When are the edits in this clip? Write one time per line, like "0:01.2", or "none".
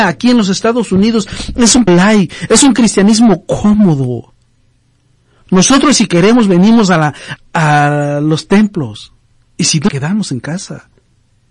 0:01.9
0:07.4
0:09.9